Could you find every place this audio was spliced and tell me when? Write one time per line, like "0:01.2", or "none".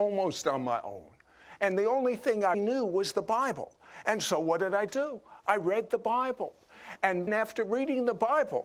0:02.5
0:07.3

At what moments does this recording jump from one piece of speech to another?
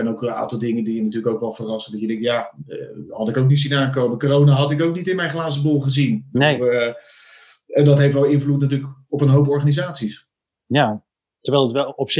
none

